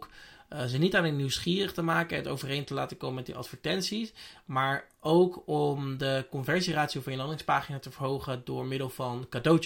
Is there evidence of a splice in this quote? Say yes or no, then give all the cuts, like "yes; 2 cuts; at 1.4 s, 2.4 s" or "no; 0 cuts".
no; 0 cuts